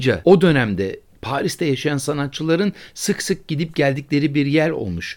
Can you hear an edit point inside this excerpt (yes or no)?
no